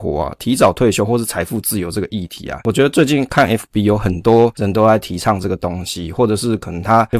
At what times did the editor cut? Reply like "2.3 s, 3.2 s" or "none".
none

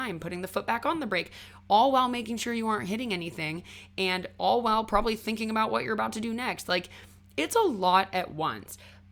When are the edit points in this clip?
none

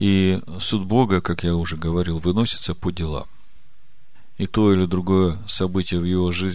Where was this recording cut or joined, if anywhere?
4.5 s

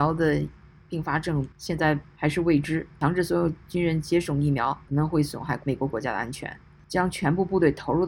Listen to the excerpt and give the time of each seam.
1.5 s

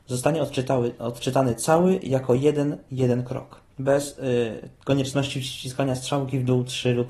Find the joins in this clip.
3.7 s

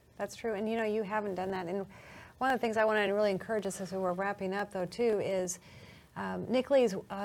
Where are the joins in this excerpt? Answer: none

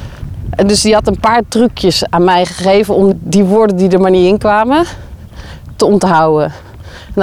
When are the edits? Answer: 3.1 s

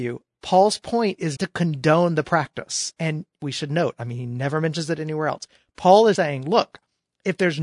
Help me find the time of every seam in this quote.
1.4 s, 6.2 s

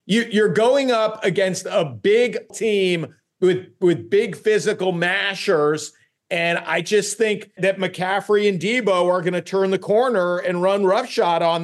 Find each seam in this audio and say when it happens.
2.5 s, 7.6 s

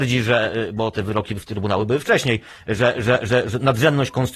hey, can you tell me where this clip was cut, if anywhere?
none

